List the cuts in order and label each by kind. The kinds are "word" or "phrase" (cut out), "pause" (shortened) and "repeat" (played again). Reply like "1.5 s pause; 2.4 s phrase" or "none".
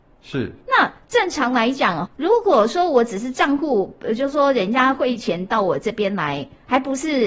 2.1 s word